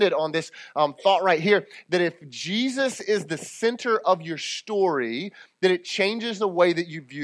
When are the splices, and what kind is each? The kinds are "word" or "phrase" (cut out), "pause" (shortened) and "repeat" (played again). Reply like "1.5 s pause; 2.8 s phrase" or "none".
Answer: none